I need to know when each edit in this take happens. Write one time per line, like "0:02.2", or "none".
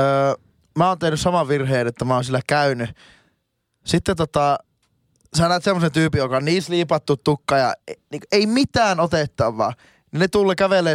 none